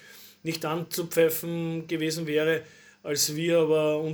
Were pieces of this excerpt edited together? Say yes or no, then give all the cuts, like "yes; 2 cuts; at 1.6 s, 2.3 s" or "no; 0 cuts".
no; 0 cuts